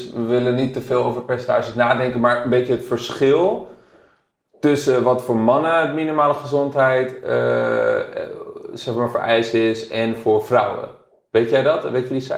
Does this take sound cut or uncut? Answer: uncut